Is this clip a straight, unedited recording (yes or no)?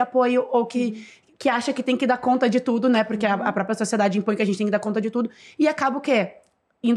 yes